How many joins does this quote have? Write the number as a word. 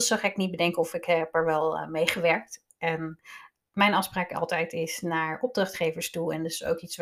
zero